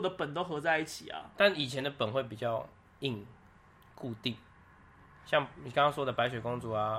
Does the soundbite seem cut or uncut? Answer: uncut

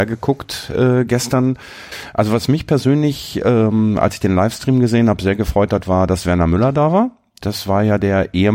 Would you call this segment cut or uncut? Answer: uncut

